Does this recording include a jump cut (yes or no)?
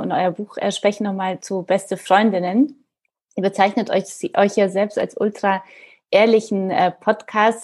yes